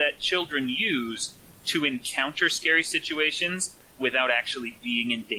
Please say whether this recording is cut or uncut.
uncut